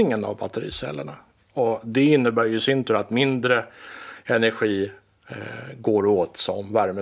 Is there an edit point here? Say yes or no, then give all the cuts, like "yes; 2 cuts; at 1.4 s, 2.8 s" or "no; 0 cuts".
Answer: no; 0 cuts